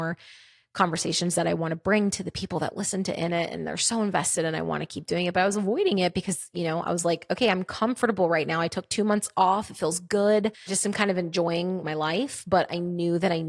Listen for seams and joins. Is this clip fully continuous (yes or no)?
no